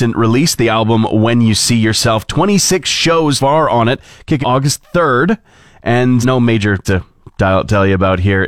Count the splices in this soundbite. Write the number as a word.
four